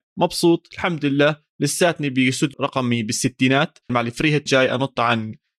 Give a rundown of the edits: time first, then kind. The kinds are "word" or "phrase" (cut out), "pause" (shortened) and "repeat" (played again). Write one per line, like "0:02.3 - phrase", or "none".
0:02.5 - word
0:03.9 - word
0:04.5 - word